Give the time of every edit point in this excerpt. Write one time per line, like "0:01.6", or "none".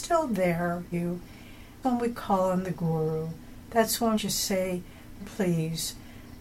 0:00.9
0:01.8
0:04.1
0:05.2